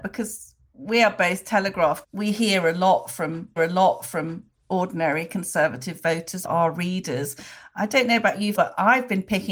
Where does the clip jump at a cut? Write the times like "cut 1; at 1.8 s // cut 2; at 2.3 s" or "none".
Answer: cut 1; at 2.0 s // cut 2; at 3.6 s // cut 3; at 8.5 s